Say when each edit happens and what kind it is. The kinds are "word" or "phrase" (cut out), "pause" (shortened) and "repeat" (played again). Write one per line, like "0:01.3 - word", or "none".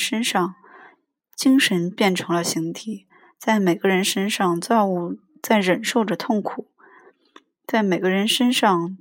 none